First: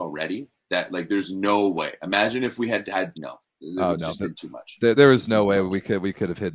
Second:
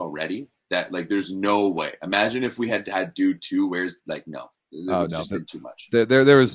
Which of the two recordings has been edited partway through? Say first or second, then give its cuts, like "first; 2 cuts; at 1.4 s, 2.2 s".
first; 2 cuts; at 3.1 s, 5.0 s